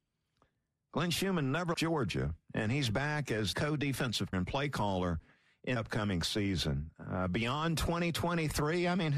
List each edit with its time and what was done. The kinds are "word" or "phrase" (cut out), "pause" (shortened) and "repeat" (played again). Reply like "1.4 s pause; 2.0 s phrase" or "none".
1.7 s word; 3.5 s word; 4.3 s word; 5.8 s word